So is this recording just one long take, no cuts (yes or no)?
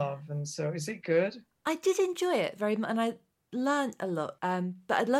yes